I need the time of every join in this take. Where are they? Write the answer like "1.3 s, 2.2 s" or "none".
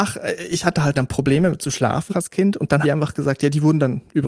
0.9 s, 2.1 s, 2.8 s